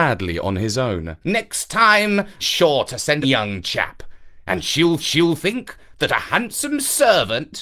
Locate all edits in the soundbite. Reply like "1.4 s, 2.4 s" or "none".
1.2 s, 2.4 s, 3.2 s, 5.0 s